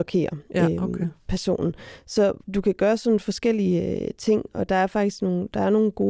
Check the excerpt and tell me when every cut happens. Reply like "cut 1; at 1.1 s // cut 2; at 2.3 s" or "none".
cut 1; at 2.4 s